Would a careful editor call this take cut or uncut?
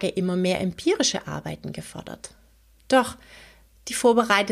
uncut